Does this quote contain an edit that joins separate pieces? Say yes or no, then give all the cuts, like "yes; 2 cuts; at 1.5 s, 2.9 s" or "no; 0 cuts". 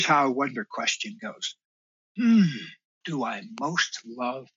yes; 1 cut; at 3.0 s